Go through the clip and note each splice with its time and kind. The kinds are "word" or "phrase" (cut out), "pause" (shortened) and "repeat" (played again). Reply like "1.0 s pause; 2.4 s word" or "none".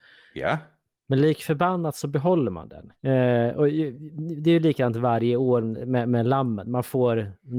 3.0 s pause